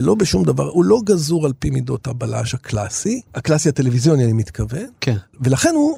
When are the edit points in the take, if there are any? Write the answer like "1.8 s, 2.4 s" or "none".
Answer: 3.3 s